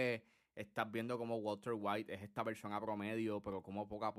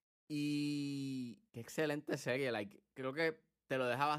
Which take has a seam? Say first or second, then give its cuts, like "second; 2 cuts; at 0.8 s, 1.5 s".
second; 1 cut; at 1.5 s